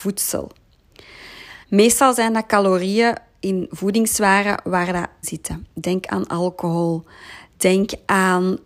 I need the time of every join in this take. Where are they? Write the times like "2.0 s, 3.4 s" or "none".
1.6 s, 5.2 s